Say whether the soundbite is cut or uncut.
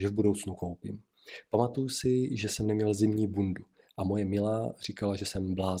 uncut